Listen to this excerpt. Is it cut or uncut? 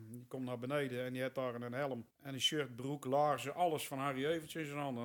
cut